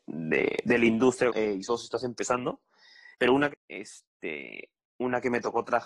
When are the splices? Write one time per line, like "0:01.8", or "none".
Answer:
0:01.3
0:01.7
0:03.1
0:03.5